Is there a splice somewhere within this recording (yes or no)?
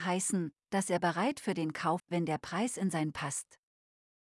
yes